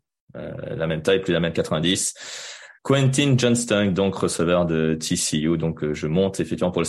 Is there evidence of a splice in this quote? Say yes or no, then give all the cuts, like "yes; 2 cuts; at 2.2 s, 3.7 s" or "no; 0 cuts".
yes; 1 cut; at 2.7 s